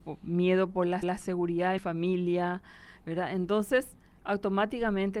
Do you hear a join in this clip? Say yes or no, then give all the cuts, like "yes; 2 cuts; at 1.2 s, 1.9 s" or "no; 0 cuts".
yes; 2 cuts; at 1.0 s, 1.8 s